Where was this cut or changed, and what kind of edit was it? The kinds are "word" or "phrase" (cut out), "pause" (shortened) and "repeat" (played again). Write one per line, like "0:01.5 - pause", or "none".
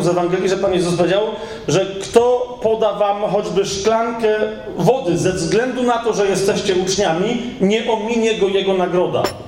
none